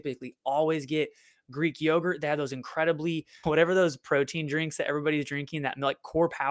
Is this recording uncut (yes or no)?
no